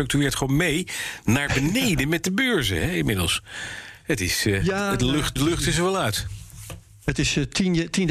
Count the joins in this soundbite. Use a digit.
1